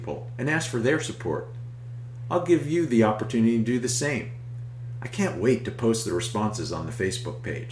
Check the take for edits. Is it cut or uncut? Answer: uncut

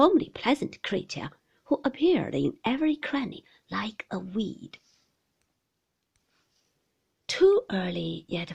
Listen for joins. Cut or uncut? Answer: uncut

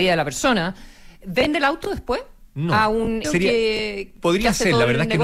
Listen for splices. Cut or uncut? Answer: cut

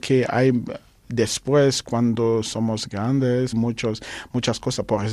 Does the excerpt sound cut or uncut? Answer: cut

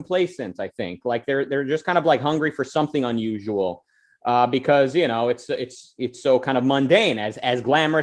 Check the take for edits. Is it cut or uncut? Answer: uncut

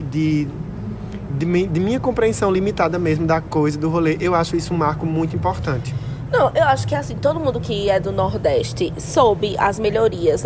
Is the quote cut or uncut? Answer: uncut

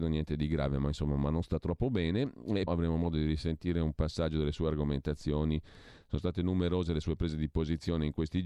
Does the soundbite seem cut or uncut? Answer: cut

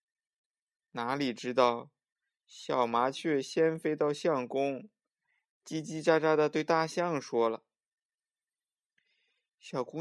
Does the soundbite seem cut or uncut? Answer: uncut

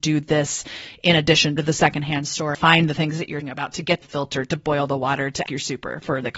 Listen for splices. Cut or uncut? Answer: cut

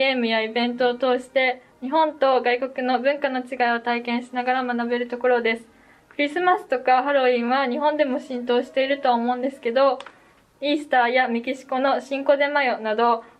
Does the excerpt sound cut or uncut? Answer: uncut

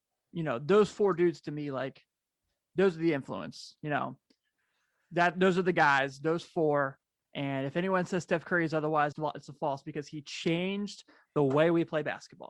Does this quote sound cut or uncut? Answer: cut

